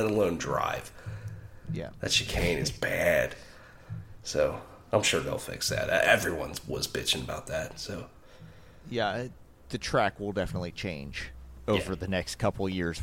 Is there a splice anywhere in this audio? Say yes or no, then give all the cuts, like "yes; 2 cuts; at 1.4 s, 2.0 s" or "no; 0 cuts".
no; 0 cuts